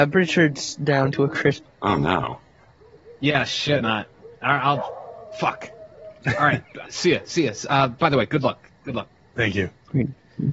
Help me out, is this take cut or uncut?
cut